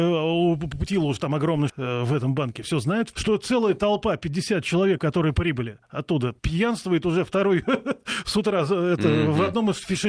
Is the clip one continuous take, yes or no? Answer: no